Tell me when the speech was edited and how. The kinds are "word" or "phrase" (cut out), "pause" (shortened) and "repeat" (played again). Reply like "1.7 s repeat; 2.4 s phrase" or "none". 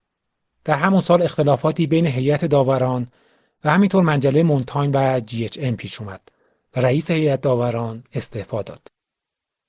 none